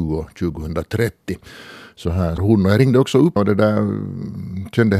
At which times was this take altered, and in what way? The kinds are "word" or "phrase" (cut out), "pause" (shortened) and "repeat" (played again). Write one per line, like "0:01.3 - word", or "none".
0:02.4 - word
0:03.4 - word